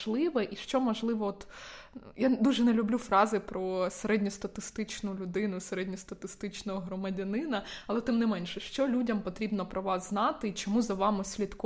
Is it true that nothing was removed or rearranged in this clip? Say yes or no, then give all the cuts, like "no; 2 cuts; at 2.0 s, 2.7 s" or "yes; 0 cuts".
yes; 0 cuts